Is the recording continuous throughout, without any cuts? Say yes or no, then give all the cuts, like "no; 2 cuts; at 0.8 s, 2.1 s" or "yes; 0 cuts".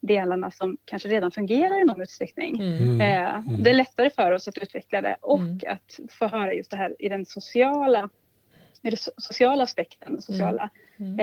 yes; 0 cuts